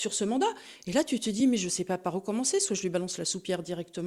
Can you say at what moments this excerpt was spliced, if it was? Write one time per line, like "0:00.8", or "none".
none